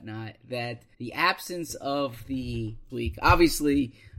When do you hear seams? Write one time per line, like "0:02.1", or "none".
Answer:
0:00.9
0:02.9